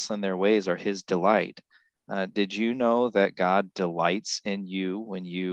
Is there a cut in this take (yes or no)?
no